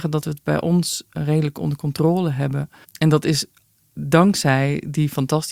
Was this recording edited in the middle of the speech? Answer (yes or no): yes